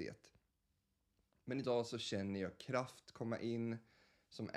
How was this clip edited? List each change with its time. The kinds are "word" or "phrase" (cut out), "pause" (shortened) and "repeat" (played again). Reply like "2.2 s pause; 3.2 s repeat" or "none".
none